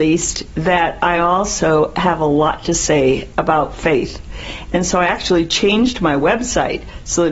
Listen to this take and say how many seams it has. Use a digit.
0